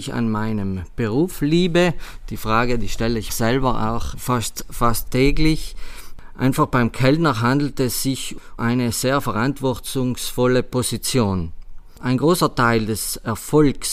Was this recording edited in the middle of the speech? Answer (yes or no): yes